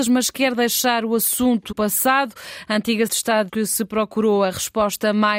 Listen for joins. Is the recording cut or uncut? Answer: cut